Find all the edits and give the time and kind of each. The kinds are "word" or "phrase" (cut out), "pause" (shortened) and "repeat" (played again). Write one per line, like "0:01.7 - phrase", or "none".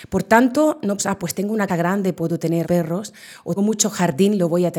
0:01.0 - word
0:01.7 - word
0:02.6 - word
0:03.6 - word